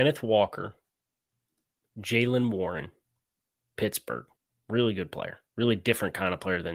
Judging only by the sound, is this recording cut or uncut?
cut